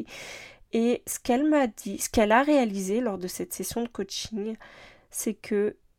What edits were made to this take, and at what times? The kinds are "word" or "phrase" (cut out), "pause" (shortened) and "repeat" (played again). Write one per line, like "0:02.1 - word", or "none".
none